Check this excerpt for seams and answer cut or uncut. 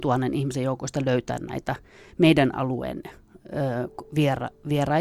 uncut